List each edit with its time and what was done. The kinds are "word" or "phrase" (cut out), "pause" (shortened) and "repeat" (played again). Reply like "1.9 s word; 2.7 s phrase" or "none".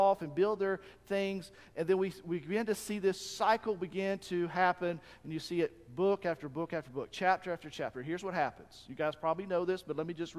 none